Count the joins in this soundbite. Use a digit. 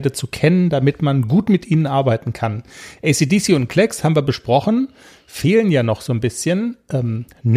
0